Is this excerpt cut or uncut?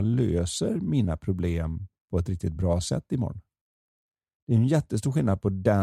uncut